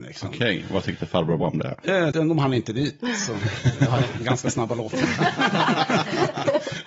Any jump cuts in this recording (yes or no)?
yes